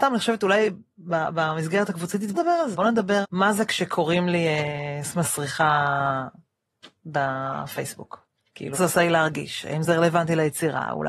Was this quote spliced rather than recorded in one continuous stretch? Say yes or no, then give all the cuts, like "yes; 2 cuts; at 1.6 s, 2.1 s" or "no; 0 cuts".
yes; 5 cuts; at 2.3 s, 2.7 s, 3.2 s, 5.1 s, 8.7 s